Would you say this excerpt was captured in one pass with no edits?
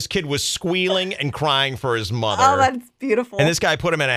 yes; 0 cuts

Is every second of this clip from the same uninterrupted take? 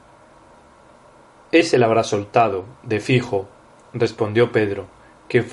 yes; 0 cuts

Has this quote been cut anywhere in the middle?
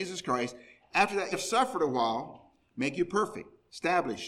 yes; 1 cut; at 1.3 s

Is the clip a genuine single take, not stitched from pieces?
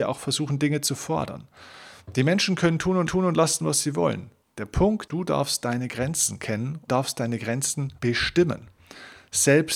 no; 5 cuts; at 3.1 s, 4.4 s, 5.1 s, 6.9 s, 8.0 s

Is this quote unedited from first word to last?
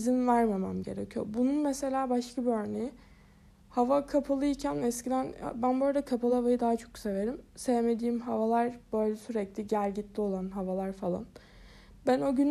yes; 0 cuts

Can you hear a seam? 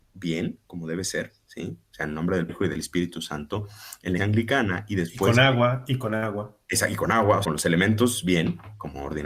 yes; 3 cuts; at 2.5 s, 4.2 s, 7.4 s

